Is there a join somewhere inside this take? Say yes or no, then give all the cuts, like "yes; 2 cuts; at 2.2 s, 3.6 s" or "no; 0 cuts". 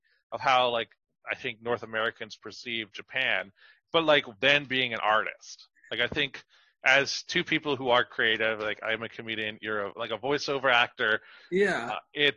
no; 0 cuts